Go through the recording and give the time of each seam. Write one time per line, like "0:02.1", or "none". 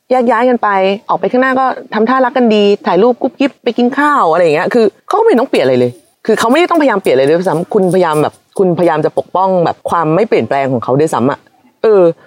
0:03.6
0:05.0
0:06.1
0:09.8